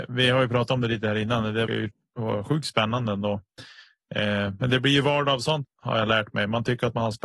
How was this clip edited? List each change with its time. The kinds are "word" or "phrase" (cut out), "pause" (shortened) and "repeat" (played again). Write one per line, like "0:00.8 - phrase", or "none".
0:01.7 - word
0:05.6 - word